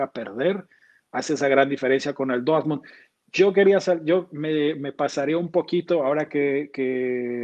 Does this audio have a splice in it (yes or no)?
no